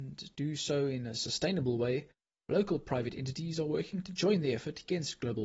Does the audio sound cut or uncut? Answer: uncut